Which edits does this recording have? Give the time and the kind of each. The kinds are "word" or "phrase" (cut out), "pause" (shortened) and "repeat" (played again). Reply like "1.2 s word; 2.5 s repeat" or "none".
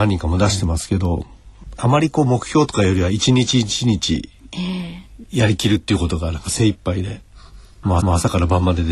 8.0 s repeat